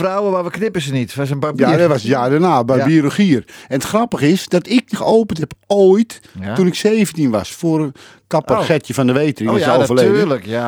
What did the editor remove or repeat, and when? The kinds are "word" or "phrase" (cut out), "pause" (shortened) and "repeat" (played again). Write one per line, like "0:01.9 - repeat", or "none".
0:04.9 - word